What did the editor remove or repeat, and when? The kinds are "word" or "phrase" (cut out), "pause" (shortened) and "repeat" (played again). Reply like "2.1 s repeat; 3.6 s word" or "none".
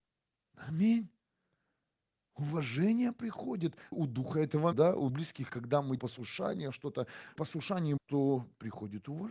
3.9 s word; 4.7 s word; 5.1 s word; 5.5 s word; 6.0 s word; 7.4 s word; 8.0 s word